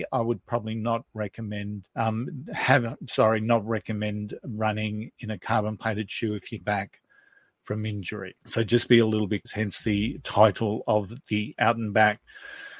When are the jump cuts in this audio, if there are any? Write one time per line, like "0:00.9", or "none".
0:01.9
0:06.6
0:08.4
0:09.4

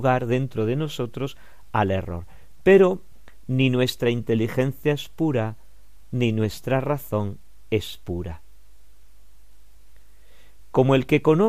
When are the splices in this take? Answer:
none

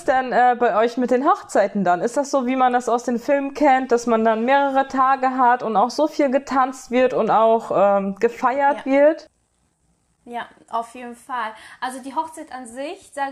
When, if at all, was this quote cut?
none

